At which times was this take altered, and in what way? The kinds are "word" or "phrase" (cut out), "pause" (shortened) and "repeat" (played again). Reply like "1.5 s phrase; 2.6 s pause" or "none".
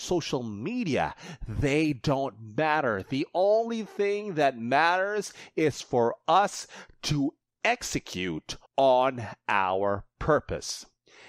8.7 s pause